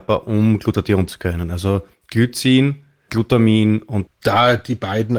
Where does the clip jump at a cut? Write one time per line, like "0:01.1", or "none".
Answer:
0:01.1
0:03.1
0:04.1